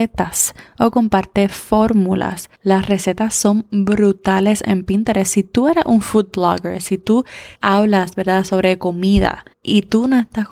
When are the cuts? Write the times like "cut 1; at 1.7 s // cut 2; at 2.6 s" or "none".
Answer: cut 1; at 2.5 s // cut 2; at 7.5 s // cut 3; at 9.5 s

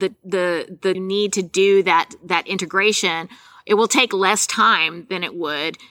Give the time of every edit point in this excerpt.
cut 1; at 0.9 s

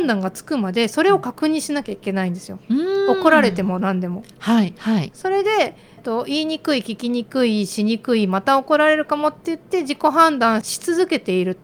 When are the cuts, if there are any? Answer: cut 1; at 2.6 s

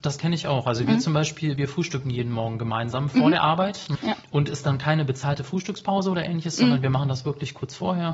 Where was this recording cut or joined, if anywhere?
cut 1; at 3.9 s

